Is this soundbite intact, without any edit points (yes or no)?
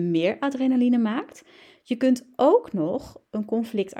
yes